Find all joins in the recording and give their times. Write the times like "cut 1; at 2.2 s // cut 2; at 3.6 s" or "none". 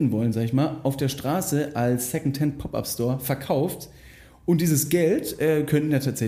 none